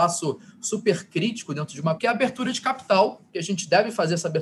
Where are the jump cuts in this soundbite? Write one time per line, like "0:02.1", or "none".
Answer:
0:02.0
0:03.3